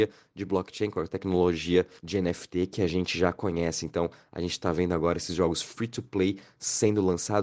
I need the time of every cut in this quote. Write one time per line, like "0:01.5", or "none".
0:02.0